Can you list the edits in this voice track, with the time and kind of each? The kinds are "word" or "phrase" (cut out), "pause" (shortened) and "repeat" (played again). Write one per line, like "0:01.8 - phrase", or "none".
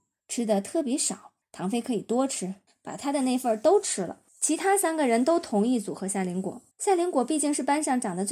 0:01.4 - pause
0:02.7 - pause
0:04.3 - pause
0:06.7 - pause